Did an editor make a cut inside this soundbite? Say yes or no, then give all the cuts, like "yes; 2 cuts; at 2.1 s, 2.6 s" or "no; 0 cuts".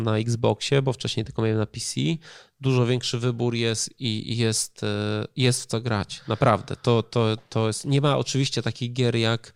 no; 0 cuts